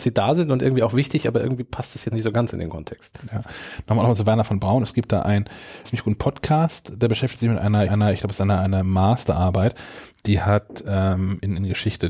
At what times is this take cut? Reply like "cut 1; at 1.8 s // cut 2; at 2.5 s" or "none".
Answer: cut 1; at 2.1 s // cut 2; at 5.8 s // cut 3; at 7.9 s